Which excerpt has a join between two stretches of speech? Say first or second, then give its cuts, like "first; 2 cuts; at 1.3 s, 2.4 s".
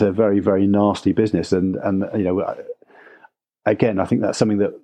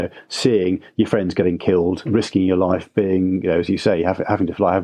second; 1 cut; at 2.0 s